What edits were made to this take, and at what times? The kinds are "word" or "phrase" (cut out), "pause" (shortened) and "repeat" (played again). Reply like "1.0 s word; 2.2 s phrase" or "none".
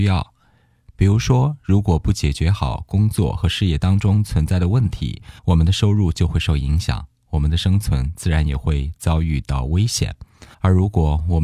5.4 s pause; 10.5 s pause